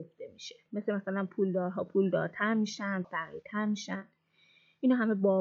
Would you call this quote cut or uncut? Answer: cut